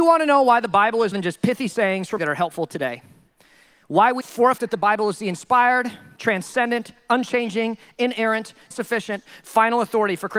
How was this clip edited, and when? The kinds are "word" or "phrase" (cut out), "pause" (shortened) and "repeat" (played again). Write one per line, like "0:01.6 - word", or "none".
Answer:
0:01.1 - word
0:02.2 - word
0:04.2 - word
0:04.6 - word
0:06.2 - word
0:08.7 - word